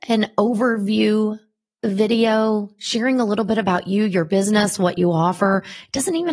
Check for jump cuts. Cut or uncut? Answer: uncut